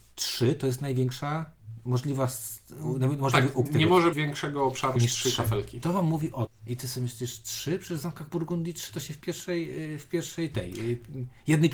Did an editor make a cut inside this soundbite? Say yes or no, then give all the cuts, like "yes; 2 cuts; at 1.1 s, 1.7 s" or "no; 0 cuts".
yes; 4 cuts; at 3.7 s, 4.1 s, 5.0 s, 6.5 s